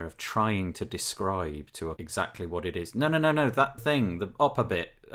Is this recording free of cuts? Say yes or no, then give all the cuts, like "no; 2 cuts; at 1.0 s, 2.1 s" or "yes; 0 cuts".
no; 2 cuts; at 2.0 s, 3.8 s